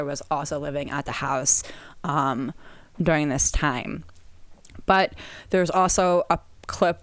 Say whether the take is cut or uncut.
uncut